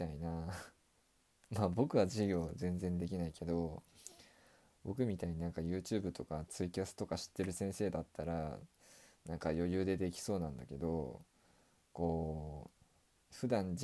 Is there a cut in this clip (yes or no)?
no